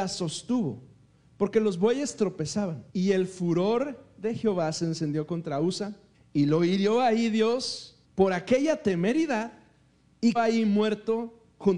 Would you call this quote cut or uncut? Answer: cut